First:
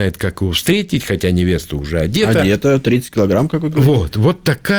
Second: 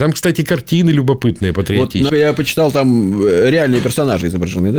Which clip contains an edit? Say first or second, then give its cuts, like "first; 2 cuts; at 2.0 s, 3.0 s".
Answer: second; 1 cut; at 2.1 s